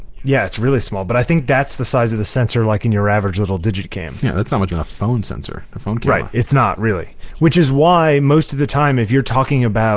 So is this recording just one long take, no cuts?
no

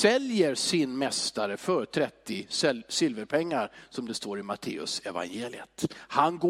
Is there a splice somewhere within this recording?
no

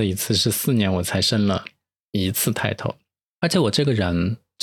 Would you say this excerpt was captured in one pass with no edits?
yes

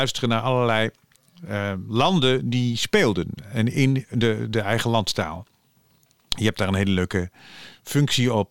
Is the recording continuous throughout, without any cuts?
yes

